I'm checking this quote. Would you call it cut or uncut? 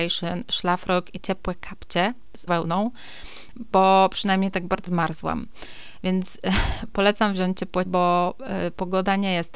cut